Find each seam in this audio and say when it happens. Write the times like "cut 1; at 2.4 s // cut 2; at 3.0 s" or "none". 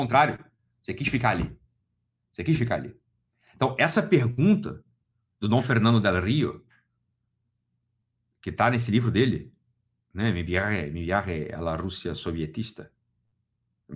none